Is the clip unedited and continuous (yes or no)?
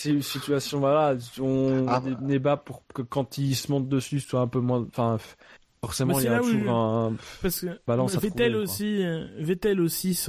yes